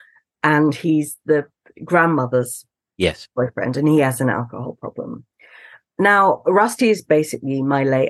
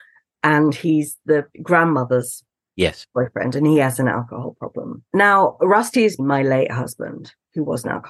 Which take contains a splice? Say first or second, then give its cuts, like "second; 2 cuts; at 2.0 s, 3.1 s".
second; 3 cuts; at 1.5 s, 5.1 s, 6.2 s